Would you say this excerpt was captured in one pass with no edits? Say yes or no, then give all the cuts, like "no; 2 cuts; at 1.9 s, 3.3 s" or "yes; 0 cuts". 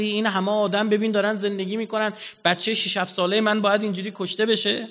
yes; 0 cuts